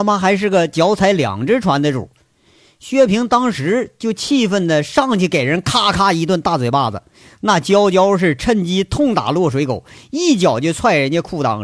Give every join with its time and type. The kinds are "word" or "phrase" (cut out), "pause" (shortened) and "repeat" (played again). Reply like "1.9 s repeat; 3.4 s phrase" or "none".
none